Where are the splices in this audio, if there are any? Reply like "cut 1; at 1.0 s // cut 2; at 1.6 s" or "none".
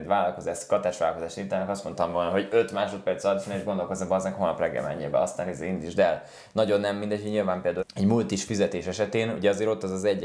cut 1; at 7.8 s